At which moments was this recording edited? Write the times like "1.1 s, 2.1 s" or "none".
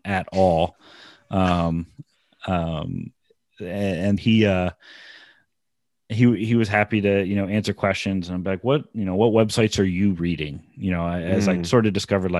4.2 s